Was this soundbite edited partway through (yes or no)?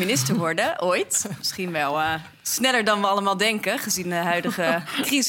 no